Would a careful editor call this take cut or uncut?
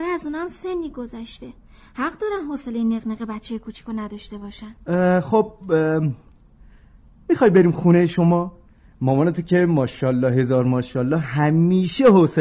uncut